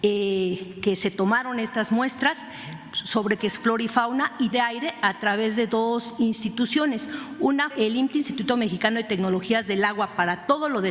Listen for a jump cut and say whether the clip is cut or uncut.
cut